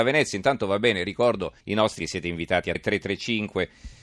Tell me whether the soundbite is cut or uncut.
cut